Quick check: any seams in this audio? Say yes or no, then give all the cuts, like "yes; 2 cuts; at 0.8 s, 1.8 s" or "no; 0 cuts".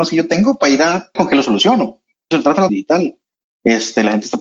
yes; 3 cuts; at 1.2 s, 2.3 s, 2.7 s